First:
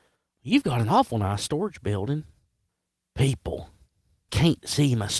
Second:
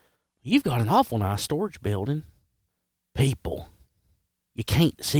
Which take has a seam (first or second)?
first